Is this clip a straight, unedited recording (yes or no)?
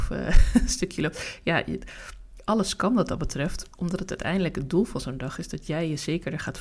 yes